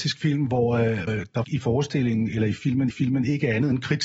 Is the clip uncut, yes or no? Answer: no